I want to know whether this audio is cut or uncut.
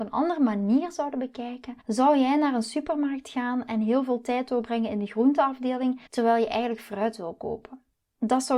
cut